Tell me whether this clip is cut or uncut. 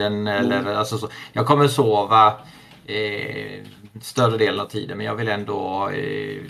uncut